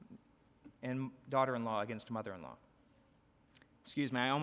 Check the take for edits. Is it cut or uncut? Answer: uncut